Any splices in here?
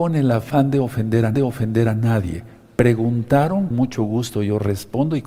yes; 2 cuts; at 1.3 s, 3.7 s

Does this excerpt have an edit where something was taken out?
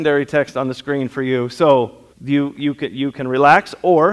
yes; 1 cut; at 2.1 s

